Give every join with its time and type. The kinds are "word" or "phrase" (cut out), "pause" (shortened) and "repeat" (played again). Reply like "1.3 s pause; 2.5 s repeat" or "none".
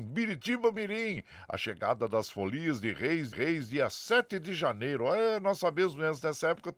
3.3 s repeat